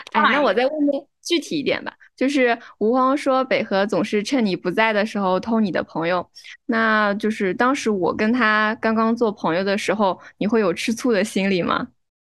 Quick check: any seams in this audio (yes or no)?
no